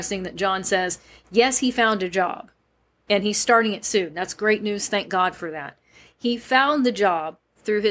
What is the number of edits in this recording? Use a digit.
0